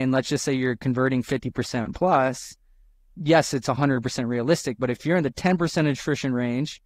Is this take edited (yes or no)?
no